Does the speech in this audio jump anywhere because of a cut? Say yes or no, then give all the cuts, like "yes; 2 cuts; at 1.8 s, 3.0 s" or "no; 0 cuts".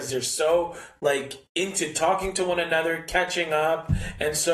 no; 0 cuts